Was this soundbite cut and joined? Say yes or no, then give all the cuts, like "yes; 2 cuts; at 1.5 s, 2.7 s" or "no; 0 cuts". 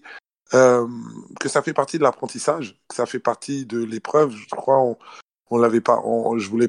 no; 0 cuts